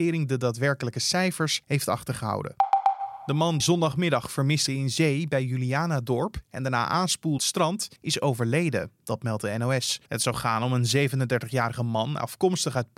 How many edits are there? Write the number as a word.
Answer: six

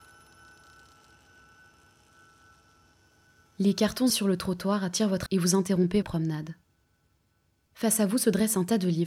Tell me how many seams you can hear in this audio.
three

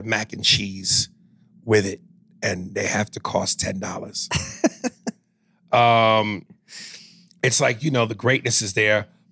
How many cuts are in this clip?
zero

